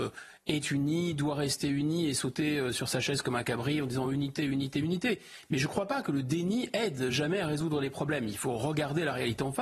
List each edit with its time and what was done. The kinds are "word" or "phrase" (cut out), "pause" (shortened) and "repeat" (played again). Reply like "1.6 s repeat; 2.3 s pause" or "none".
none